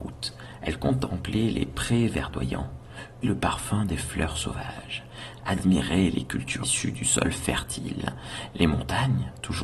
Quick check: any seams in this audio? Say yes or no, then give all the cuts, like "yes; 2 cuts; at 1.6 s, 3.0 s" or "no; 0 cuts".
yes; 2 cuts; at 3.2 s, 6.6 s